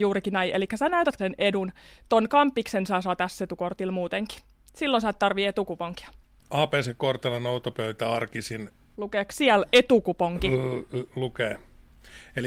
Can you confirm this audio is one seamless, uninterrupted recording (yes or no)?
no